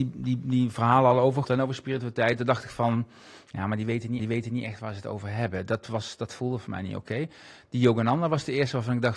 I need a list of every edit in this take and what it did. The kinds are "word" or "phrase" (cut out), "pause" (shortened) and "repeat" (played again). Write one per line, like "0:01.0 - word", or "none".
0:01.4 - word
0:04.2 - repeat